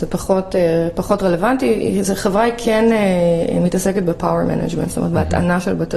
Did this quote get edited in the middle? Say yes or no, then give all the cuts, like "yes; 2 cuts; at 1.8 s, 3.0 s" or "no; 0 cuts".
no; 0 cuts